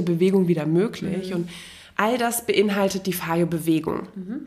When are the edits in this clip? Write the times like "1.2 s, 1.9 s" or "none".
none